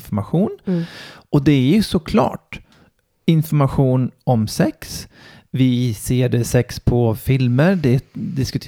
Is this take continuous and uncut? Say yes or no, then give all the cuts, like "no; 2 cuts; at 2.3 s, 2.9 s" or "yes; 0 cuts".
yes; 0 cuts